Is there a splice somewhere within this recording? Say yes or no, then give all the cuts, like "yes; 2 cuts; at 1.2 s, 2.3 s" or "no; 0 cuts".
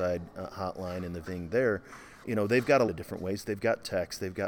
yes; 3 cuts; at 1.2 s, 2.2 s, 2.9 s